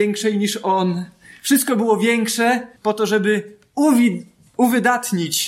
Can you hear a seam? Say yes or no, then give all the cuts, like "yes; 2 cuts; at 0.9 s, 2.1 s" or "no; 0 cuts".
yes; 1 cut; at 2.8 s